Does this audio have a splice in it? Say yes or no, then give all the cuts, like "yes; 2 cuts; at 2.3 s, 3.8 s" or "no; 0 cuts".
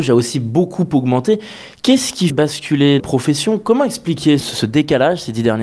yes; 3 cuts; at 2.3 s, 3.0 s, 4.4 s